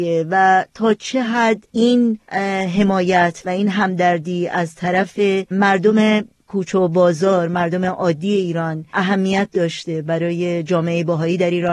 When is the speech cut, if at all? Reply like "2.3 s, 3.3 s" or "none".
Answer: none